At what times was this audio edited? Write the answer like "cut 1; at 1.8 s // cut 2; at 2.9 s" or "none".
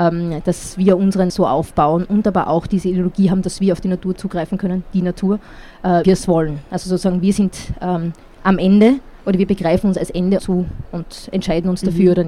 cut 1; at 1.3 s // cut 2; at 6.0 s // cut 3; at 10.4 s